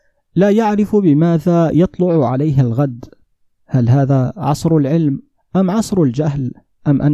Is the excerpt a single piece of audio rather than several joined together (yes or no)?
yes